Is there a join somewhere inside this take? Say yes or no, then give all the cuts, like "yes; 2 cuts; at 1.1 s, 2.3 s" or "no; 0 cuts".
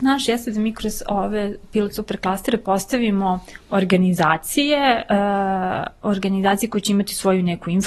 no; 0 cuts